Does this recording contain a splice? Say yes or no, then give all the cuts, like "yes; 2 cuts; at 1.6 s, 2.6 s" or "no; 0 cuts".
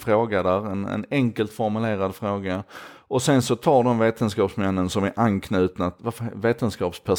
no; 0 cuts